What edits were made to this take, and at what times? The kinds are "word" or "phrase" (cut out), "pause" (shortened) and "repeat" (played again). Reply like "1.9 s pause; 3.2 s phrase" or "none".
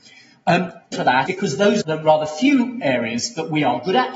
0.9 s word; 1.3 s word; 1.8 s word